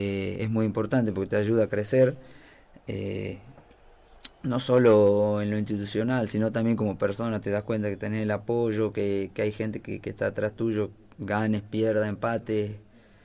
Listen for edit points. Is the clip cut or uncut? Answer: uncut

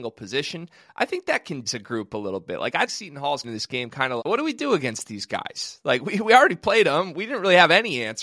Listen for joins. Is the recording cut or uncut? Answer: cut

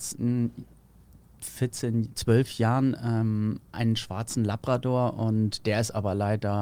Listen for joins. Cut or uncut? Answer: uncut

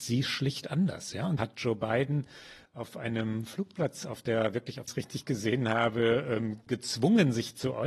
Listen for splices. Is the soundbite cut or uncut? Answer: cut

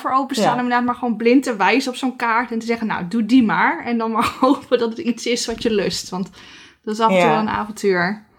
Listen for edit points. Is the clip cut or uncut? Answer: uncut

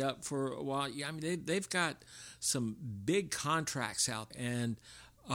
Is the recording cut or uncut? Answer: cut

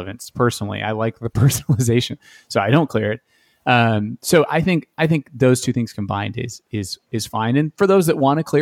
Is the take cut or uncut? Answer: uncut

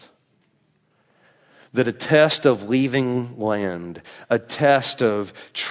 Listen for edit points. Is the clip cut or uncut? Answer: uncut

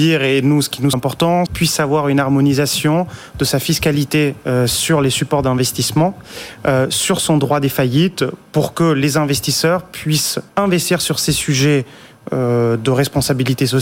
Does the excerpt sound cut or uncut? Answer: cut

